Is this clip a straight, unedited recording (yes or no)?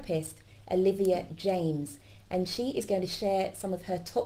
yes